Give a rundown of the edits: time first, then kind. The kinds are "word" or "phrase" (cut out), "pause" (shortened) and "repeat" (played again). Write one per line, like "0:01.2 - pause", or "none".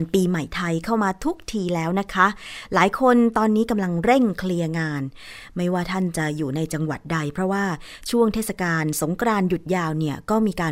none